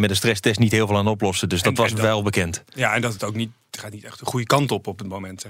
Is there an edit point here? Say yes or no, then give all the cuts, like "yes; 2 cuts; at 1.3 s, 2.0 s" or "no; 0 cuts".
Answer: no; 0 cuts